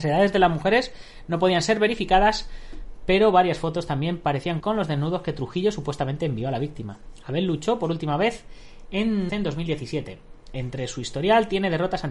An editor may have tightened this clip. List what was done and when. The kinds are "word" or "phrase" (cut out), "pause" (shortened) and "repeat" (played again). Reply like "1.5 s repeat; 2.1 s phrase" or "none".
4.6 s word; 9.3 s word